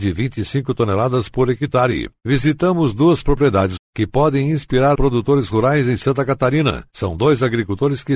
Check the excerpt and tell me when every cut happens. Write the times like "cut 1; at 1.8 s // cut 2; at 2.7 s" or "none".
cut 1; at 3.8 s // cut 2; at 4.9 s

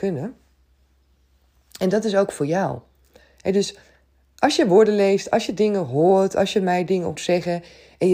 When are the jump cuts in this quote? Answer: cut 1; at 7.1 s

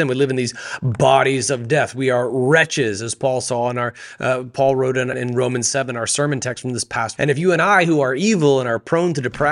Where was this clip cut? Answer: cut 1; at 5.1 s // cut 2; at 7.2 s

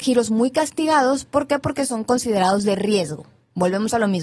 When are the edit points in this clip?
none

